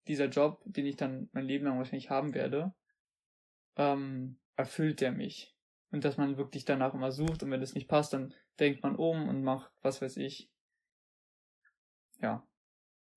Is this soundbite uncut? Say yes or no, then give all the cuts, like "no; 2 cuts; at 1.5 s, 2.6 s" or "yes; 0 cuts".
no; 2 cuts; at 4.5 s, 5.8 s